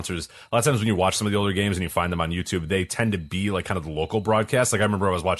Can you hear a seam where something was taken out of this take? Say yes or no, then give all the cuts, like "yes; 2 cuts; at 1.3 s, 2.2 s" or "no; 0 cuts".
no; 0 cuts